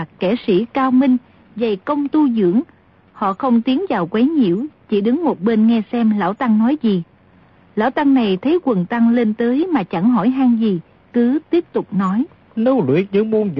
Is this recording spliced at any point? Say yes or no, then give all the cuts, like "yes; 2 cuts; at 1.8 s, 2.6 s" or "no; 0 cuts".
no; 0 cuts